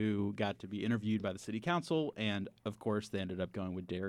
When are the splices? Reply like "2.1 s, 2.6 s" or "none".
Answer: none